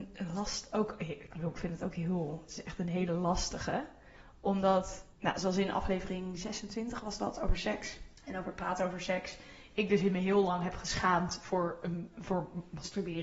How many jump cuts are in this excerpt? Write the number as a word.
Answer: two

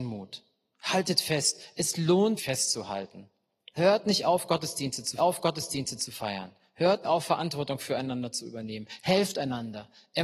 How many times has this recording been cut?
three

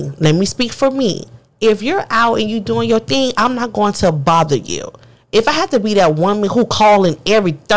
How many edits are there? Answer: zero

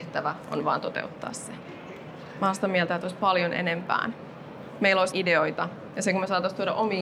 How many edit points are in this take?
two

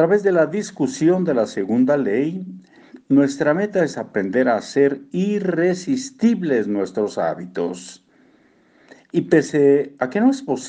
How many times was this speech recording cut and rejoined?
zero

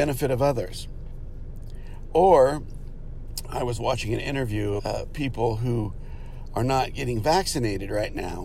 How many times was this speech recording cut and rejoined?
one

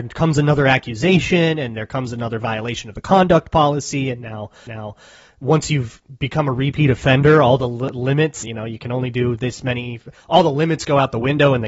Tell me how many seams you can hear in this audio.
two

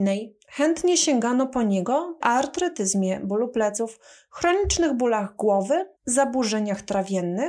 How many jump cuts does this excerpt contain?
two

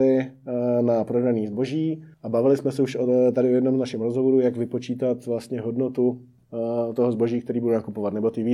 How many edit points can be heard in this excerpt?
one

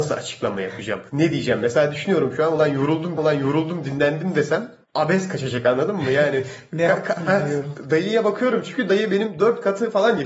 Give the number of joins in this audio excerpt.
three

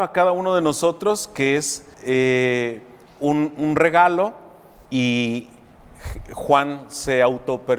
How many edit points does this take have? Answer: two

